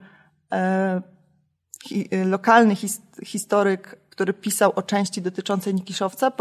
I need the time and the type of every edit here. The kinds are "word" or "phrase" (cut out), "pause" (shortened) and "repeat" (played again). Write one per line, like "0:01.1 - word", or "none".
0:04.1 - pause